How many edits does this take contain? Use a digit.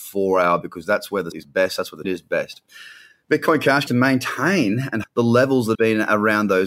5